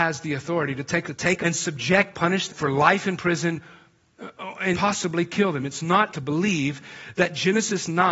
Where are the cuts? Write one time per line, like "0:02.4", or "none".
0:01.0
0:01.4
0:02.1
0:02.5
0:04.7
0:06.1